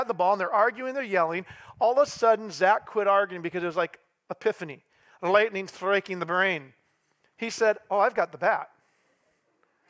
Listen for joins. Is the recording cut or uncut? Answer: uncut